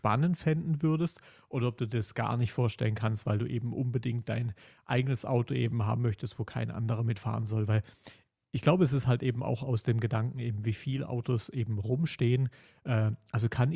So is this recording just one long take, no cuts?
yes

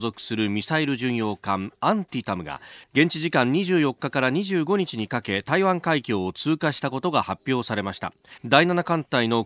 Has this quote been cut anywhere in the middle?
yes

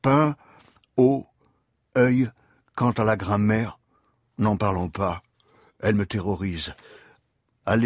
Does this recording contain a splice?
no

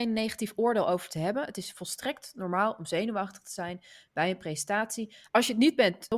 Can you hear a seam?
no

